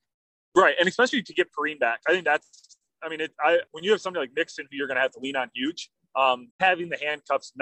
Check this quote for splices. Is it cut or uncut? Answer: cut